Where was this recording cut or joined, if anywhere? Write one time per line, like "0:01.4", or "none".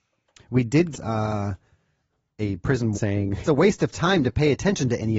0:00.9
0:02.9
0:03.4